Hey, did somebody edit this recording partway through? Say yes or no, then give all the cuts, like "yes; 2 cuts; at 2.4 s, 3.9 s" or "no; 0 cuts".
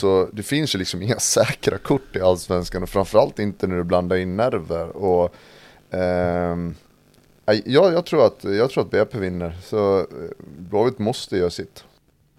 no; 0 cuts